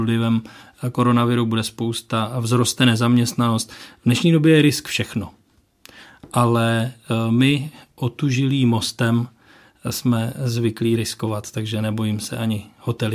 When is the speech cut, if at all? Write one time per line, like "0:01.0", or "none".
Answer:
none